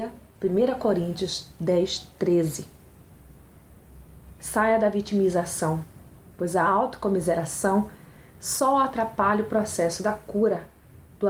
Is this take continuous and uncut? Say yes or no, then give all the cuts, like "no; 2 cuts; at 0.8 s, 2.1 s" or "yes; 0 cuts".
yes; 0 cuts